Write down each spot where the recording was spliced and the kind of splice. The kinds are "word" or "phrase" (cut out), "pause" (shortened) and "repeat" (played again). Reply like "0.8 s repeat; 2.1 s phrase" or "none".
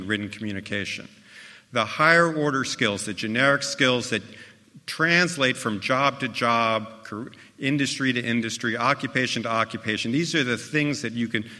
none